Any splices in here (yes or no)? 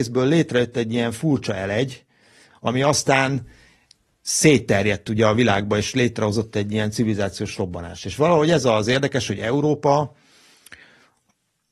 no